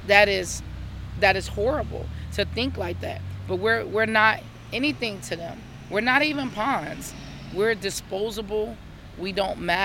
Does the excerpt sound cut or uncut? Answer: uncut